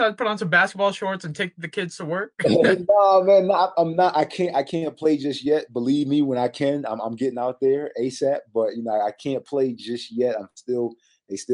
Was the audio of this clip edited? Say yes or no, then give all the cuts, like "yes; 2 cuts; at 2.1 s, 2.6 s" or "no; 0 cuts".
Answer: no; 0 cuts